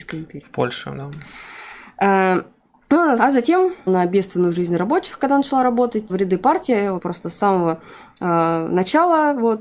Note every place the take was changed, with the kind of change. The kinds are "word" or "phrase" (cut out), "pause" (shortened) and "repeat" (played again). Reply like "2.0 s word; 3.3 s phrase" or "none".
2.7 s pause; 3.2 s phrase; 3.9 s word; 6.1 s phrase; 7.0 s word